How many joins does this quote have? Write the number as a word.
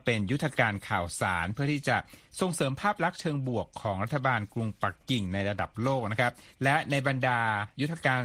one